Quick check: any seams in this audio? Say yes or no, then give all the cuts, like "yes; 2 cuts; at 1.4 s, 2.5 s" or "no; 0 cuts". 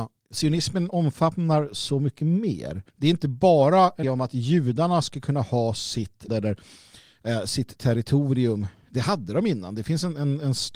yes; 3 cuts; at 2.9 s, 4.0 s, 6.3 s